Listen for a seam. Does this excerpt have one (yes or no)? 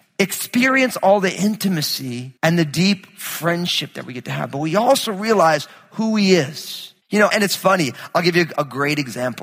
yes